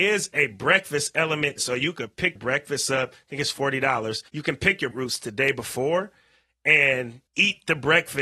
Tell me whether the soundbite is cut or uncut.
cut